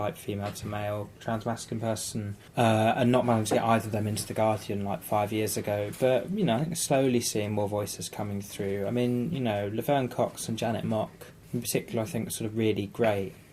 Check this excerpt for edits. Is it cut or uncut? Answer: uncut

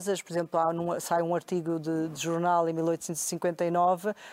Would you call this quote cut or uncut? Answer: uncut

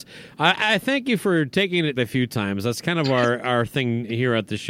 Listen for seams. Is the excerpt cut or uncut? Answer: cut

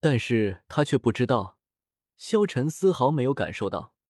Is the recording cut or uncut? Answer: uncut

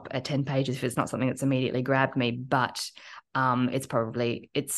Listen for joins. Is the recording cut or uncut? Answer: uncut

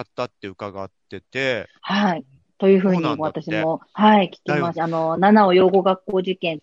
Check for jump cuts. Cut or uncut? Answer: cut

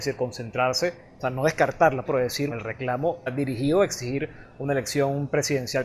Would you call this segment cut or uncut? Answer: cut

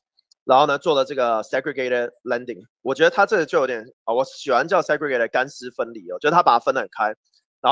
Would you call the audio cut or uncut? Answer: cut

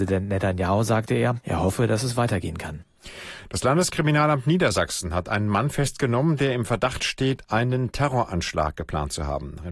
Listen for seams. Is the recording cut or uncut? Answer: uncut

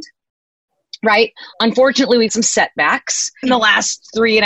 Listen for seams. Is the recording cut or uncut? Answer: cut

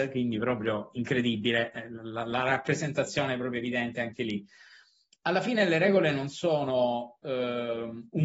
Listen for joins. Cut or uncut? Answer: uncut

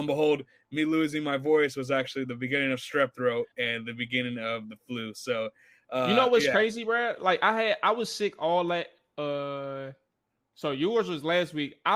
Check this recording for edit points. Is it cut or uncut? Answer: uncut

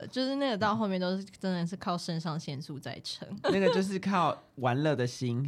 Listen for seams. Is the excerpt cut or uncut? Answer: cut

